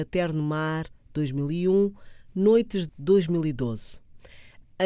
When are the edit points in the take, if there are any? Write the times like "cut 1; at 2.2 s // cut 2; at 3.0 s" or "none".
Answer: cut 1; at 2.9 s